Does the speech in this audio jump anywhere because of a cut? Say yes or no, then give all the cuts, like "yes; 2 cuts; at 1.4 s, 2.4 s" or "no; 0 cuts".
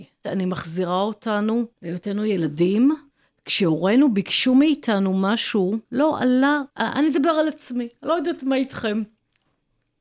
yes; 4 cuts; at 1.7 s, 3.1 s, 5.8 s, 6.7 s